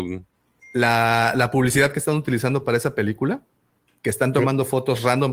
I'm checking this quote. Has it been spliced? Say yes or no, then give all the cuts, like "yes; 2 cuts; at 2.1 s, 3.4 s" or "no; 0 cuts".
no; 0 cuts